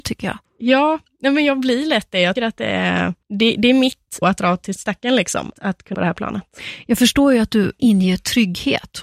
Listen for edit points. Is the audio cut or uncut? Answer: cut